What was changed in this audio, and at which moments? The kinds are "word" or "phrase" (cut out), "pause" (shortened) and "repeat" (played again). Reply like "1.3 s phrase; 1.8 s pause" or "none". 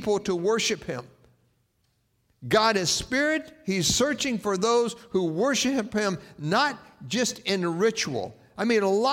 none